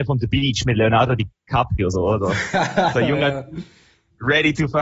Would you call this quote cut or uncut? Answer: uncut